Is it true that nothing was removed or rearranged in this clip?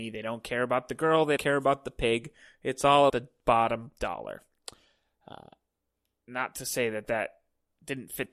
no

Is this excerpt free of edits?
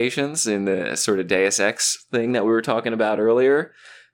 yes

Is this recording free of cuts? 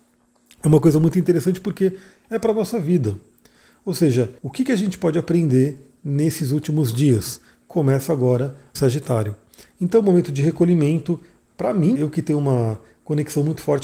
no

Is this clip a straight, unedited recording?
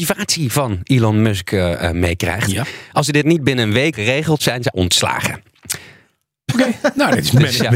no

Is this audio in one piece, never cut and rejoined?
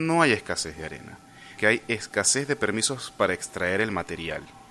no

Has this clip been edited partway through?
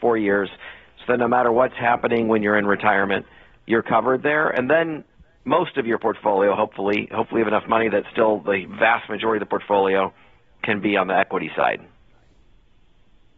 no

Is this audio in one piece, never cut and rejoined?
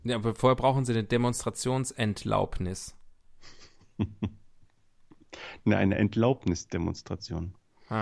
yes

